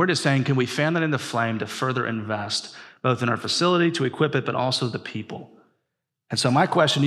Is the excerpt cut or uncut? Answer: uncut